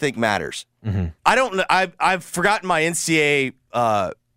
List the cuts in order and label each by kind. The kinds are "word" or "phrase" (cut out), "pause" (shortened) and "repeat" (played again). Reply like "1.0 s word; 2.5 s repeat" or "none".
1.2 s pause